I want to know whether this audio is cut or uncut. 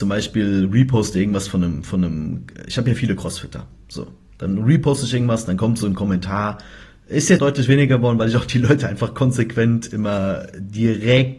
cut